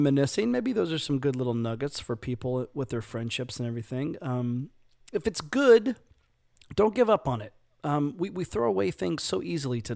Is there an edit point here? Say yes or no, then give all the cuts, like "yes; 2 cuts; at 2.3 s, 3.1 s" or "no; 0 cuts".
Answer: no; 0 cuts